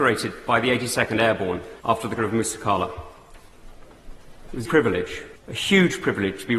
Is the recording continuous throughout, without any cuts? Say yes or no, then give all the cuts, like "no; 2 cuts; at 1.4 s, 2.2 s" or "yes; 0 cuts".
no; 4 cuts; at 1.8 s, 2.2 s, 4.6 s, 5.4 s